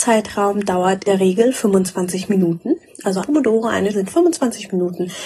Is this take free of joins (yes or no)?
no